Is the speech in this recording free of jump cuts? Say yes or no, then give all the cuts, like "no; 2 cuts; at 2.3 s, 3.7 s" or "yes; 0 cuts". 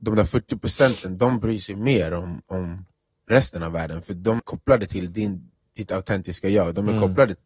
no; 1 cut; at 4.4 s